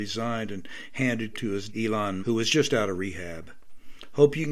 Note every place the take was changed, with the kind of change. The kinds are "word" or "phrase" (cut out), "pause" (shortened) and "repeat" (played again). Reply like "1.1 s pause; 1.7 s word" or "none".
1.3 s word; 1.7 s word; 2.2 s word